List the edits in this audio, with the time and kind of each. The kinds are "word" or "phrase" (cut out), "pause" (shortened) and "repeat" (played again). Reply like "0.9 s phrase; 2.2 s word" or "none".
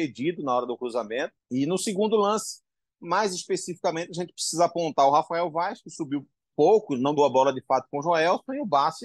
1.4 s pause; 6.5 s word; 7.2 s word